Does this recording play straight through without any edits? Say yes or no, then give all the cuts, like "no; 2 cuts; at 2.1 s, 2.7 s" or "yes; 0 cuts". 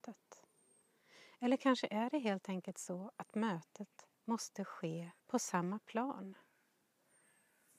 no; 2 cuts; at 4.1 s, 5.2 s